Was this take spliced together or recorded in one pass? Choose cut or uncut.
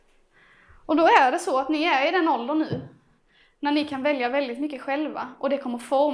uncut